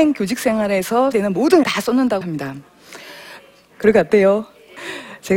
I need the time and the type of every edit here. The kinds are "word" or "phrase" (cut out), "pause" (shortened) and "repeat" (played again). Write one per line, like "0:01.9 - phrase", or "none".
0:01.1 - word
0:01.6 - word
0:02.2 - word